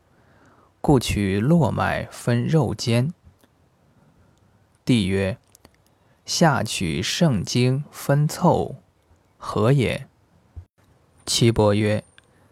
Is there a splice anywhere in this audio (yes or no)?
no